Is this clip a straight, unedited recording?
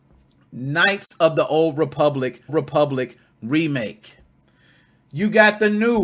no; 1 cut; at 2.5 s

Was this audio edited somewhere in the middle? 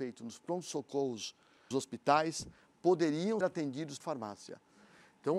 yes; 3 cuts; at 1.7 s, 3.4 s, 4.0 s

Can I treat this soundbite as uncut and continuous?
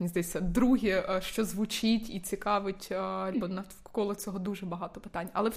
no; 1 cut; at 3.3 s

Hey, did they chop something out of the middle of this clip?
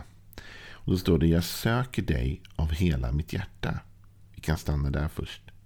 no; 0 cuts

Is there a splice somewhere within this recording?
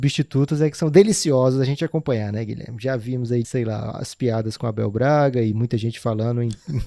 yes; 1 cut; at 3.4 s

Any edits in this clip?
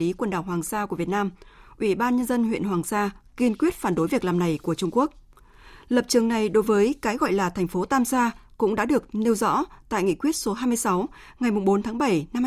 no; 0 cuts

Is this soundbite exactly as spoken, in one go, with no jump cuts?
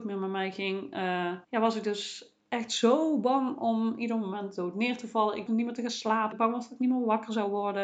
no; 3 cuts; at 1.4 s, 5.5 s, 6.3 s

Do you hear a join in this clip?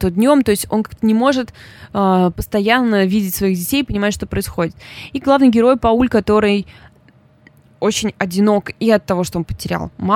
no; 0 cuts

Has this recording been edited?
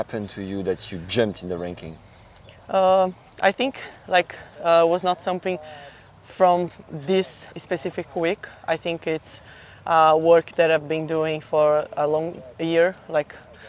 yes; 1 cut; at 7.5 s

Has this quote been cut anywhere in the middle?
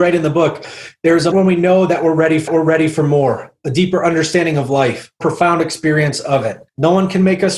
yes; 4 cuts; at 1.3 s, 2.5 s, 5.2 s, 6.7 s

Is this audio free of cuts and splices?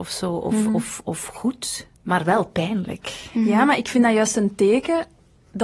no; 1 cut; at 1.9 s

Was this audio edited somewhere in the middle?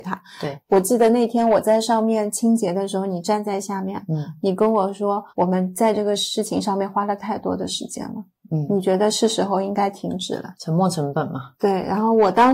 yes; 1 cut; at 5.3 s

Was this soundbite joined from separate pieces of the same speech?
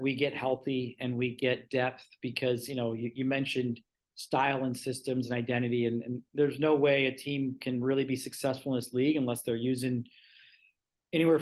no; 0 cuts

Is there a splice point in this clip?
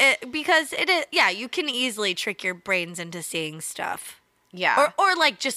no; 0 cuts

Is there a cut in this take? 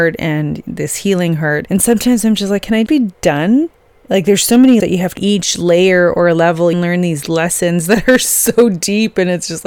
yes; 4 cuts; at 2.9 s, 4.8 s, 5.2 s, 6.7 s

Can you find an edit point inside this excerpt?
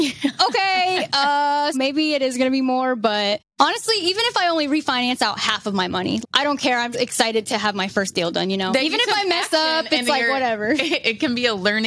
yes; 3 cuts; at 1.7 s, 6.2 s, 6.9 s

